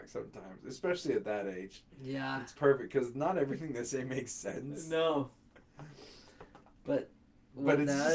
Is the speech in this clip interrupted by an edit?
no; 0 cuts

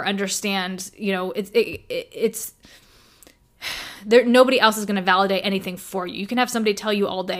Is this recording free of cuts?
yes; 0 cuts

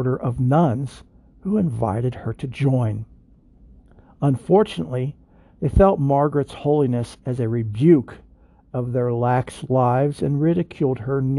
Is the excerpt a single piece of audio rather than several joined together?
yes; 0 cuts

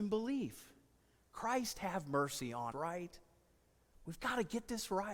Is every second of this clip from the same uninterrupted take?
no; 1 cut; at 2.7 s

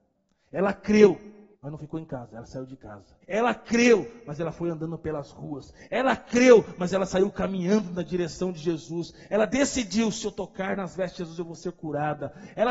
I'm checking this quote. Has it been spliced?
yes; 2 cuts; at 1.5 s, 3.2 s

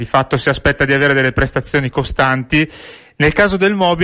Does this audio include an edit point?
no; 0 cuts

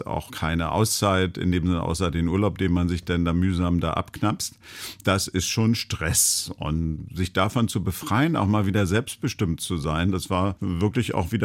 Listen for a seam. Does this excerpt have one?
no; 0 cuts

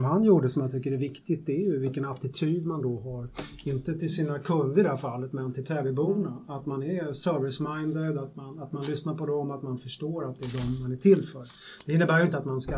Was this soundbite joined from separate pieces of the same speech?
no; 0 cuts

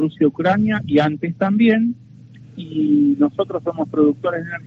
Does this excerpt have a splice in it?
no; 0 cuts

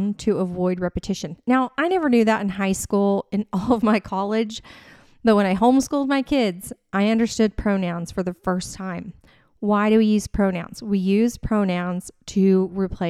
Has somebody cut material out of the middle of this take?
no; 0 cuts

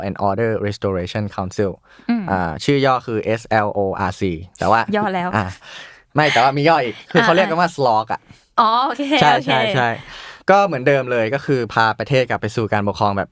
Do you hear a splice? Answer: no; 0 cuts

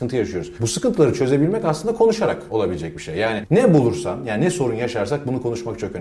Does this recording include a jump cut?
no; 0 cuts

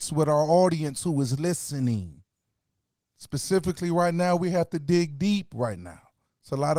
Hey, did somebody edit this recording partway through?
no; 0 cuts

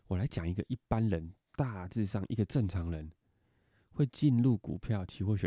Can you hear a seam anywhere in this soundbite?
no; 0 cuts

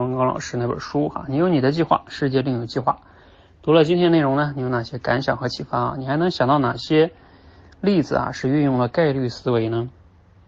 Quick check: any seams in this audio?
no; 0 cuts

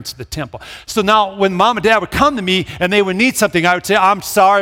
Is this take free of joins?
yes; 0 cuts

